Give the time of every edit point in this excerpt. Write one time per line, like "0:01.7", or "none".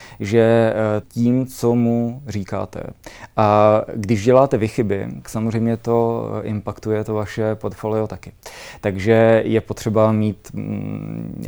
0:01.0
0:05.2